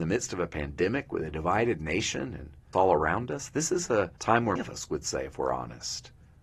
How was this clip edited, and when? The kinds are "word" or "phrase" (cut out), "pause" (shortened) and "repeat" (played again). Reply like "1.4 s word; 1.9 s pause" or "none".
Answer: 2.7 s word; 4.2 s pause; 4.6 s word